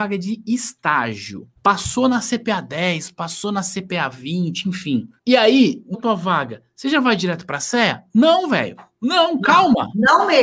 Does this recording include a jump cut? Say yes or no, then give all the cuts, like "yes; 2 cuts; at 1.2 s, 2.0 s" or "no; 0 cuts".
yes; 3 cuts; at 1.6 s, 5.2 s, 5.9 s